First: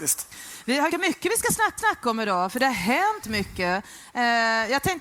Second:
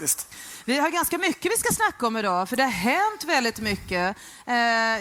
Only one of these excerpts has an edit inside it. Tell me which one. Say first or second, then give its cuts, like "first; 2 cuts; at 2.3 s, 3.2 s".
first; 3 cuts; at 0.9 s, 1.8 s, 3.2 s